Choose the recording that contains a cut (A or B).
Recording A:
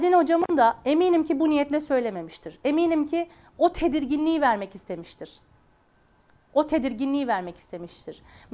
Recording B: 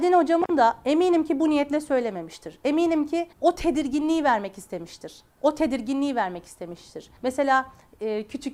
B